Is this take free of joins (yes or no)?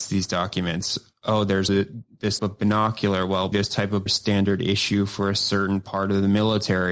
no